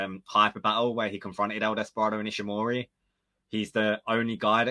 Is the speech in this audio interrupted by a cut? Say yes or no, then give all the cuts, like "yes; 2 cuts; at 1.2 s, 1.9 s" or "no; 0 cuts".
no; 0 cuts